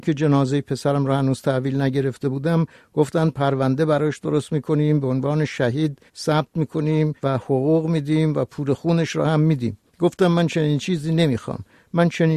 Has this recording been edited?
yes; 3 cuts; at 6.1 s, 7.2 s, 9.9 s

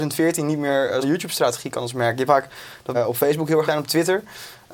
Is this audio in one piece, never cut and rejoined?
no; 4 cuts; at 1.0 s, 2.3 s, 2.9 s, 3.7 s

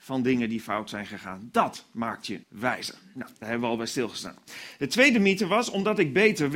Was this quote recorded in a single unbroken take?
no; 1 cut; at 2.4 s

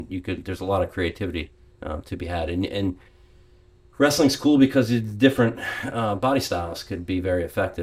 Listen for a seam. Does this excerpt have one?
no; 0 cuts

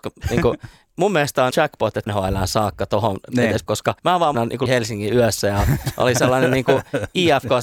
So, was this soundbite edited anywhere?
yes; 6 cuts; at 1.5 s, 2.1 s, 3.7 s, 4.0 s, 4.3 s, 4.7 s

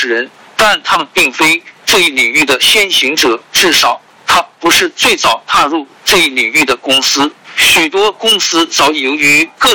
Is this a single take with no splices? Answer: no; 1 cut; at 7.4 s

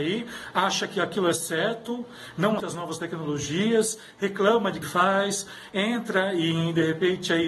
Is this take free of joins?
no; 2 cuts; at 2.6 s, 4.8 s

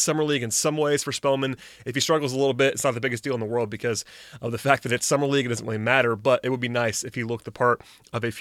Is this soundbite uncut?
yes; 0 cuts

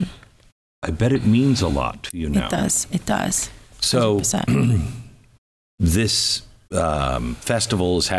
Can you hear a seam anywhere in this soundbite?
no; 0 cuts

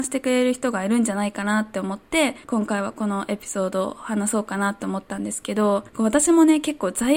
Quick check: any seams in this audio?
yes; 2 cuts; at 2.4 s, 5.9 s

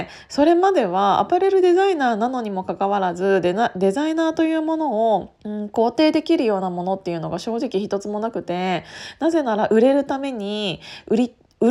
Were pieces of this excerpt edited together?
yes; 1 cut; at 5.4 s

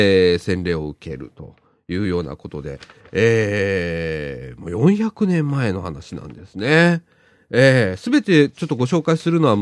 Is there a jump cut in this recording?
no; 0 cuts

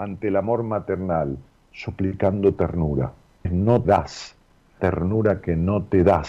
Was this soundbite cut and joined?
yes; 3 cuts; at 3.4 s, 3.8 s, 4.8 s

